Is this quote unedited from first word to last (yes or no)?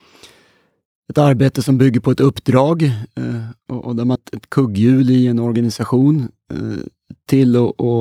no